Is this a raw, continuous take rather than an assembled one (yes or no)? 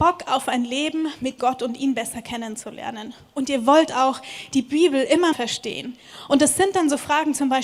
no